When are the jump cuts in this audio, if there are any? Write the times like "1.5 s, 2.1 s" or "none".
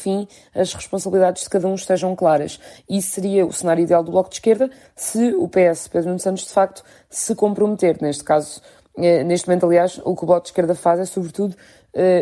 none